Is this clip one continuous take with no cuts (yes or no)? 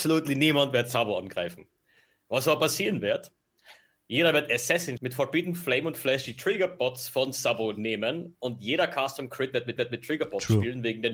no